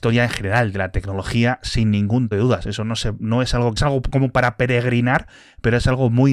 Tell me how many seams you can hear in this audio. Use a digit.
2